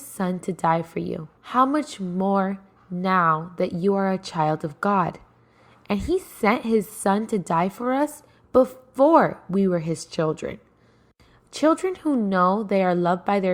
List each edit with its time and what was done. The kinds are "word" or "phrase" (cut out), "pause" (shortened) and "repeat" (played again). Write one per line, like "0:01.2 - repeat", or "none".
0:01.4 - pause